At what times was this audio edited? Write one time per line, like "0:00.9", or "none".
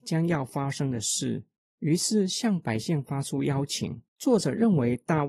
0:01.6
0:04.1